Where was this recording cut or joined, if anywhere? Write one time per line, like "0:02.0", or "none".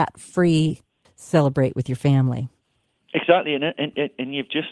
0:01.0